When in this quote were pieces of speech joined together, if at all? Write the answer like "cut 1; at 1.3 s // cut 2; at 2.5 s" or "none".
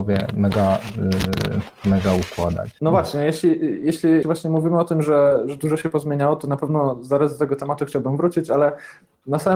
cut 1; at 4.2 s

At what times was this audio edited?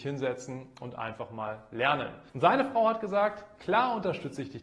cut 1; at 2.3 s

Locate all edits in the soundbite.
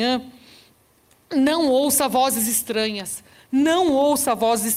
none

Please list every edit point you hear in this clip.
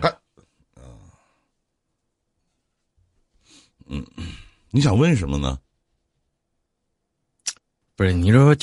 none

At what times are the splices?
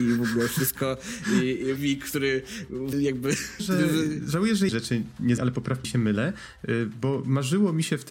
cut 1; at 1.8 s // cut 2; at 2.9 s // cut 3; at 3.6 s // cut 4; at 4.7 s // cut 5; at 5.4 s // cut 6; at 5.8 s

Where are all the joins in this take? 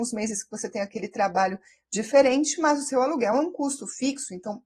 none

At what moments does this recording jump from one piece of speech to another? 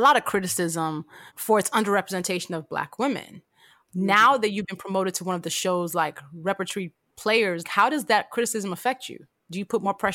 cut 1; at 7.6 s

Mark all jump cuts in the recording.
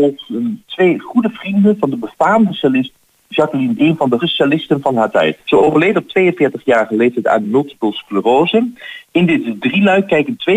cut 1; at 3.8 s // cut 2; at 4.2 s // cut 3; at 5.4 s // cut 4; at 7.4 s // cut 5; at 9.0 s

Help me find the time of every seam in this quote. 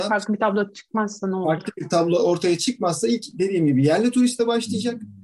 none

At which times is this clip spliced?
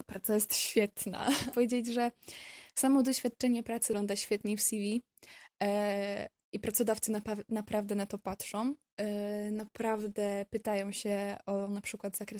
cut 1; at 1.5 s

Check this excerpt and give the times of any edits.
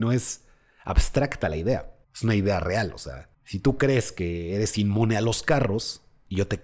cut 1; at 2.0 s // cut 2; at 3.3 s

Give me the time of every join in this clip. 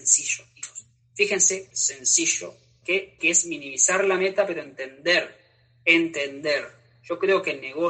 cut 1; at 1.7 s // cut 2; at 3.2 s

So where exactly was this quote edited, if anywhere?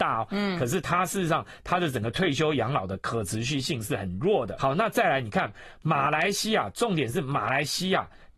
cut 1; at 4.6 s

